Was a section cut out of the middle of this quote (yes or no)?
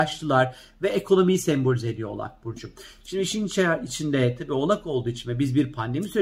no